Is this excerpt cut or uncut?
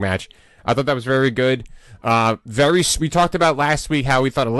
uncut